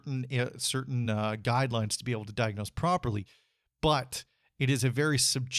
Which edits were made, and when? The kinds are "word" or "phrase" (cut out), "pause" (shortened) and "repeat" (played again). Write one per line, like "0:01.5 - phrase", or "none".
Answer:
none